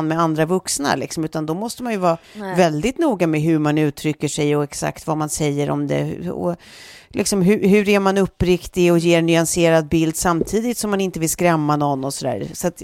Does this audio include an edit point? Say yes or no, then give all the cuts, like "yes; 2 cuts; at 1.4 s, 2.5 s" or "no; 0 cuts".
yes; 1 cut; at 2.2 s